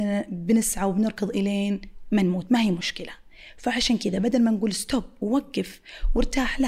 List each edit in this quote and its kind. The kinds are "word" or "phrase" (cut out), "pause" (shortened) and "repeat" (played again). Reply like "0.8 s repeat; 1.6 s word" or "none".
none